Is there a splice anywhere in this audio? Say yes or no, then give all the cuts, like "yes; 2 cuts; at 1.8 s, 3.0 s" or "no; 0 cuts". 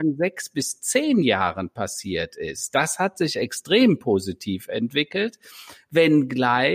no; 0 cuts